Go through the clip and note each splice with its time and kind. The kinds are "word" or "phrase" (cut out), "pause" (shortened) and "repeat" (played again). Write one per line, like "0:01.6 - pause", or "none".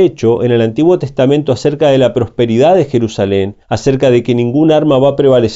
0:03.6 - pause